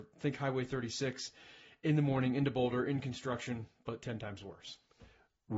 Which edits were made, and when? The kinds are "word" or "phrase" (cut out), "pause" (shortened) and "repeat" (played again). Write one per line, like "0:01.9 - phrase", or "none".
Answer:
none

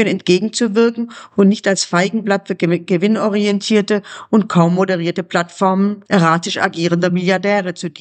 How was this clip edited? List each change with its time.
none

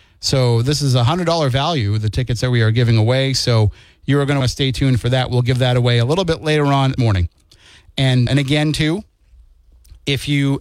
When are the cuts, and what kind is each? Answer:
0:04.4 - word
0:07.0 - word
0:08.3 - word

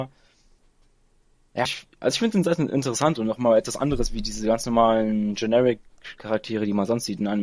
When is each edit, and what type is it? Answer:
0:01.7 - word

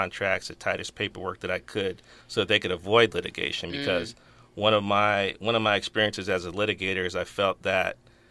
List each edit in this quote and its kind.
none

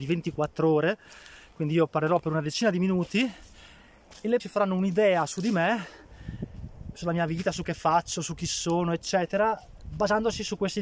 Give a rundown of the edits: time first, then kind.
0:04.4 - word
0:07.6 - word

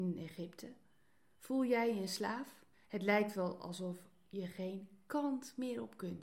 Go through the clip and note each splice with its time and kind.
0:02.7 - pause

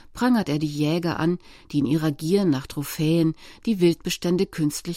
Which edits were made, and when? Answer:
none

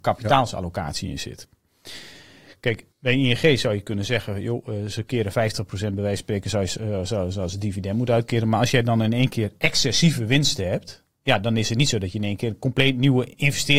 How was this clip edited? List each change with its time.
0:02.9 - pause

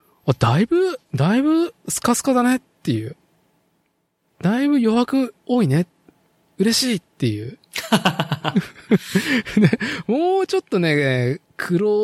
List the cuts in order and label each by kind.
0:01.0 - pause

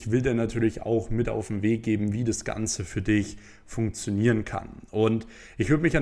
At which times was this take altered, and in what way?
none

